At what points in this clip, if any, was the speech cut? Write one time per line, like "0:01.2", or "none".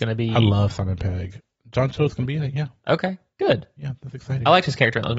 none